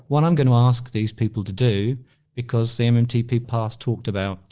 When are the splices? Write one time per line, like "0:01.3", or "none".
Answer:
0:03.4